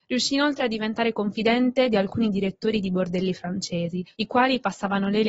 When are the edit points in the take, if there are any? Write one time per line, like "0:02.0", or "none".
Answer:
0:04.1